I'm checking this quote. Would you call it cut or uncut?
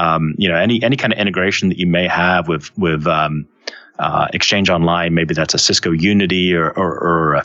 uncut